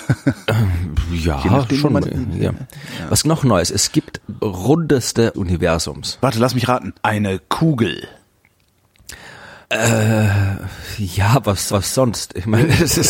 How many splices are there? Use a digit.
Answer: 7